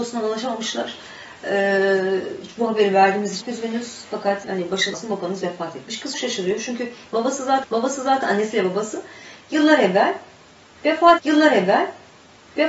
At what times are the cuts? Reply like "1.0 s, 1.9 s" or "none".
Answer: 3.4 s, 4.4 s, 4.9 s, 6.1 s, 7.6 s, 11.2 s